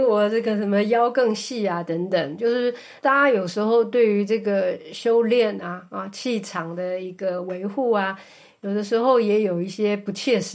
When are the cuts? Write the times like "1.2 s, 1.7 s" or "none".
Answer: none

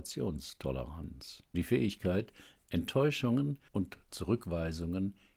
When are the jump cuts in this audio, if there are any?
1.5 s, 3.7 s

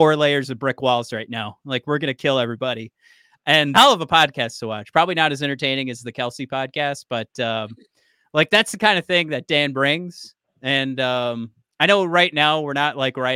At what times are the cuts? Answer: 3.7 s

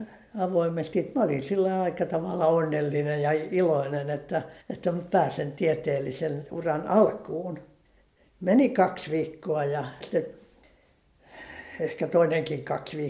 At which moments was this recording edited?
4.6 s, 10.0 s

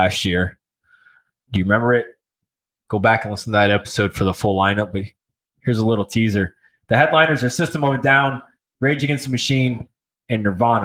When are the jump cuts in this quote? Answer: none

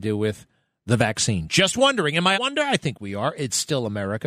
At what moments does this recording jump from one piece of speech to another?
2.3 s

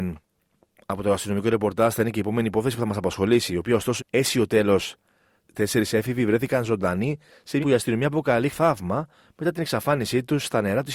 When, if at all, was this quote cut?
4.0 s, 7.6 s, 8.5 s

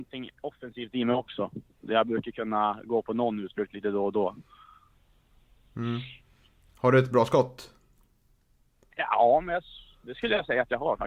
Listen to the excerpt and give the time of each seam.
none

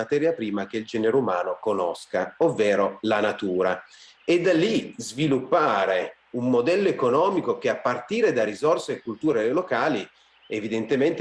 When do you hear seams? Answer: none

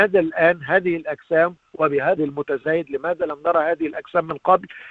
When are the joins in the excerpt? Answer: 2.2 s

